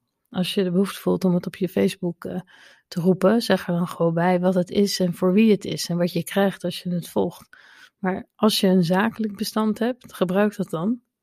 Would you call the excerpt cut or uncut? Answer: uncut